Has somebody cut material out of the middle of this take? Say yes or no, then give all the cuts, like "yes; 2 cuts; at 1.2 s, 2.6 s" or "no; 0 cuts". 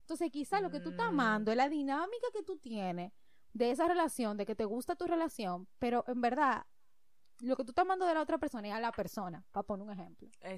no; 0 cuts